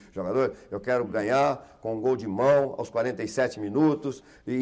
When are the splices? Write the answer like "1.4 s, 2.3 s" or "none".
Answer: none